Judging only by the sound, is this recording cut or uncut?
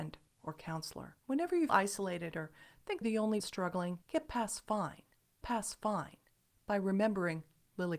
cut